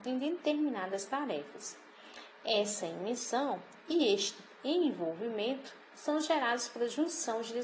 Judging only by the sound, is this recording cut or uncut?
cut